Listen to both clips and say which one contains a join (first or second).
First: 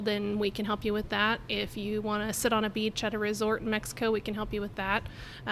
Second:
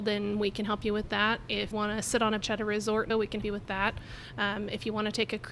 second